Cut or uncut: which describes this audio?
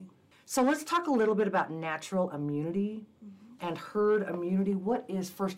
uncut